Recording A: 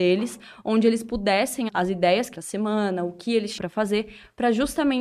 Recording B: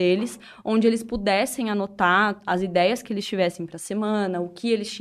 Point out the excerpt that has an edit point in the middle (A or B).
A